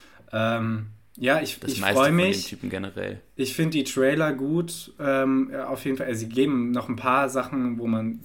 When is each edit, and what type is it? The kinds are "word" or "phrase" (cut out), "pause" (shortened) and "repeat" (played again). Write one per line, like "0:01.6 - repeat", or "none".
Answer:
none